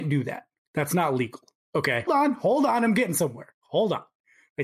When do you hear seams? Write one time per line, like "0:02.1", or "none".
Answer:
0:02.1

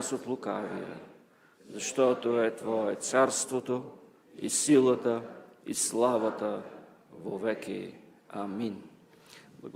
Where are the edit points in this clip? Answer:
none

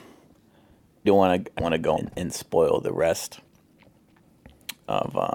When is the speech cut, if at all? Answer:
0:01.0
0:01.6
0:02.0

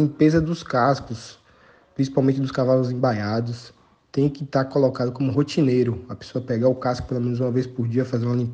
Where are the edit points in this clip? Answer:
none

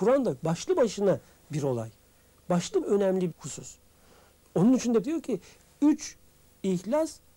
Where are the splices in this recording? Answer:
0:02.8
0:03.3
0:05.0

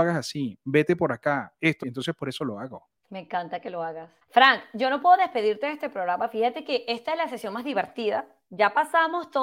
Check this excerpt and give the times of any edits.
0:01.8
0:03.0
0:04.2

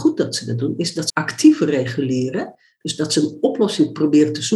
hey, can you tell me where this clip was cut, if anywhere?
0:01.1

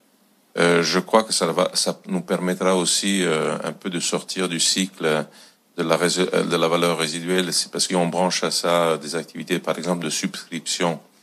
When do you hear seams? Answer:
0:07.9

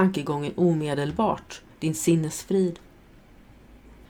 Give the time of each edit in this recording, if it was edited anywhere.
0:01.7

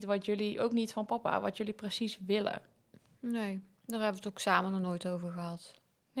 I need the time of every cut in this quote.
none

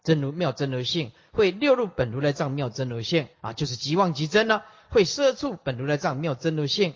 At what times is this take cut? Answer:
0:03.3

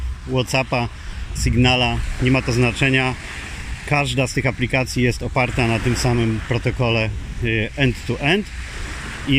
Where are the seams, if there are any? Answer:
0:01.4

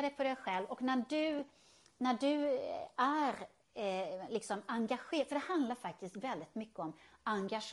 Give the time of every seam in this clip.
none

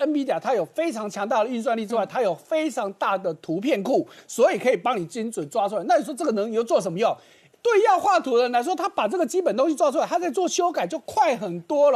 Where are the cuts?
0:07.5

